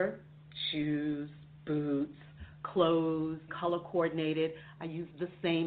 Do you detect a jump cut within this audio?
yes; 1 cut; at 3.5 s

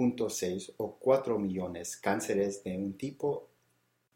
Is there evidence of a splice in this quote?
no; 0 cuts

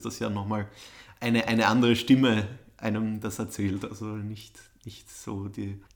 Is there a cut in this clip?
no; 0 cuts

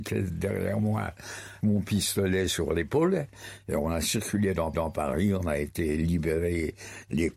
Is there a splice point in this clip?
yes; 2 cuts; at 1.6 s, 4.7 s

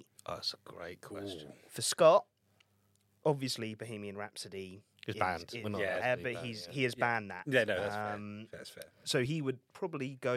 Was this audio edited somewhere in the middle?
no; 0 cuts

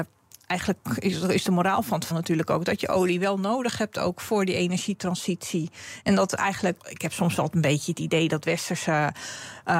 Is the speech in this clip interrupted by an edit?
yes; 2 cuts; at 2.1 s, 6.8 s

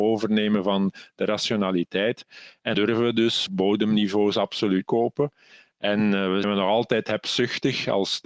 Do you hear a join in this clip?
yes; 4 cuts; at 2.7 s, 3.5 s, 4.8 s, 6.4 s

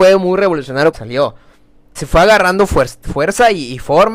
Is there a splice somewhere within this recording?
yes; 2 cuts; at 0.9 s, 2.0 s

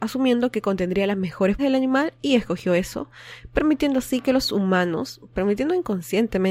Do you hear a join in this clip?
yes; 1 cut; at 1.6 s

